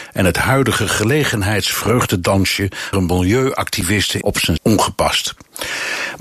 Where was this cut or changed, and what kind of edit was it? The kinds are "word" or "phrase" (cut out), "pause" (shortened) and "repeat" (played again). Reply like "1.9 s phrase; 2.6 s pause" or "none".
2.9 s phrase; 4.2 s word; 4.6 s phrase